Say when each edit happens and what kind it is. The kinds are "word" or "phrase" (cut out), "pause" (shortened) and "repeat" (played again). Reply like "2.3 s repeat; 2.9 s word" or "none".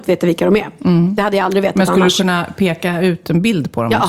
none

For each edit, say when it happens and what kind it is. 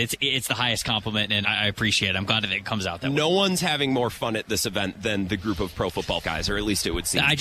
1.4 s word; 6.2 s word

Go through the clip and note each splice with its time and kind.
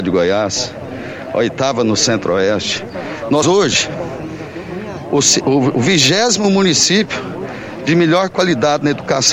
3.4 s word

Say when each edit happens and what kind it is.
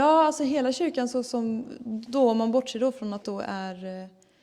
3.2 s word

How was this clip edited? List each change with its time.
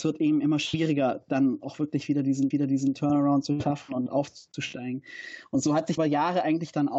2.5 s repeat; 6.0 s phrase

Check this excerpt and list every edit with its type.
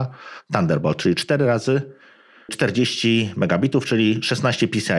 none

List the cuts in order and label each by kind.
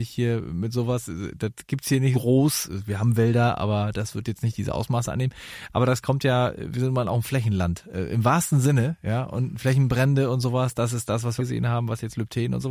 2.1 s word; 11.4 s phrase

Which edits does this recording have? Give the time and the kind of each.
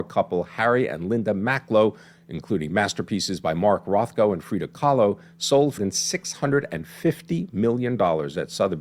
5.8 s word

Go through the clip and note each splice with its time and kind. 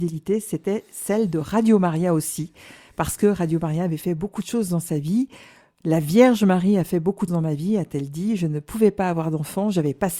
7.3 s word

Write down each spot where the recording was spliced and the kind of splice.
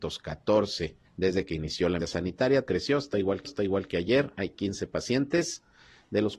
1.0 s pause; 2.0 s word; 2.7 s phrase; 3.4 s repeat

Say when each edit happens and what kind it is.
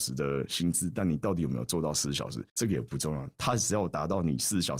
2.5 s pause

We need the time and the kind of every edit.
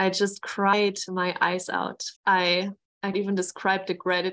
2.2 s pause; 3.1 s word

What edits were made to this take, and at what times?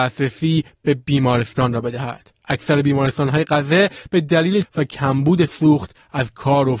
2.4 s pause; 4.6 s word

